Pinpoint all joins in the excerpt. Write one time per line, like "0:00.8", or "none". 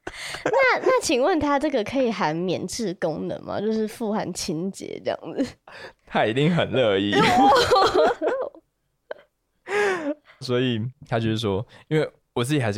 0:10.4
0:11.0